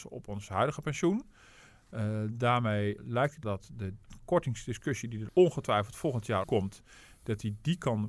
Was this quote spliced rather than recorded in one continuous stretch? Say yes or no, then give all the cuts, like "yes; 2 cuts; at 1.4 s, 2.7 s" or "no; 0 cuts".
yes; 4 cuts; at 3.0 s, 3.4 s, 5.3 s, 6.4 s